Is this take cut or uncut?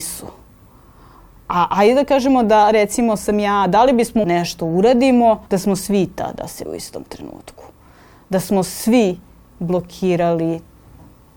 cut